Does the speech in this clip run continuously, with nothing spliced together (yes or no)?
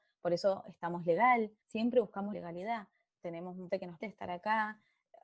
no